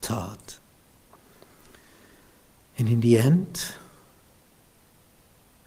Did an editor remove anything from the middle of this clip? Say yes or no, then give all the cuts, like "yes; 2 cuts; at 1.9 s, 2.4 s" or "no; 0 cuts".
no; 0 cuts